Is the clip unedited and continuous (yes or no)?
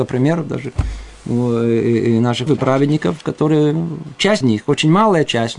no